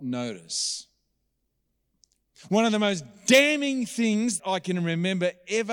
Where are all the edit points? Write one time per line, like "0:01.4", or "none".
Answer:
0:04.4